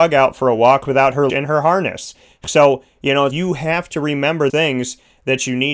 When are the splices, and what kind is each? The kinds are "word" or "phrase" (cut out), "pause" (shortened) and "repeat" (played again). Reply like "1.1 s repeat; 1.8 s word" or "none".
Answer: 1.3 s word; 3.3 s word; 4.5 s word